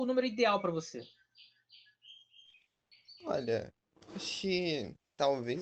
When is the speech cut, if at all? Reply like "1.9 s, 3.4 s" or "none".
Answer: none